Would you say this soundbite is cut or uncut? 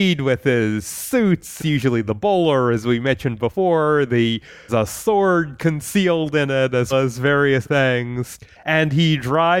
cut